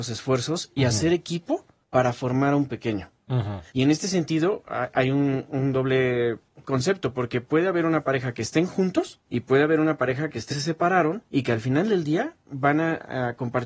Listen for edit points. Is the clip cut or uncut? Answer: cut